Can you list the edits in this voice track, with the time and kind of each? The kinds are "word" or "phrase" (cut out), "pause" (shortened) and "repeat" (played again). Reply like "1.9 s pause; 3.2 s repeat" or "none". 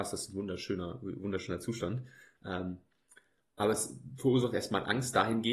none